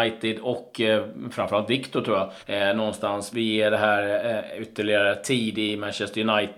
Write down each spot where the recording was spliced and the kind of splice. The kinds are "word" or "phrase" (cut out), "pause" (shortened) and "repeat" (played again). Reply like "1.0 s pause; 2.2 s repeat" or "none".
2.4 s pause; 3.3 s word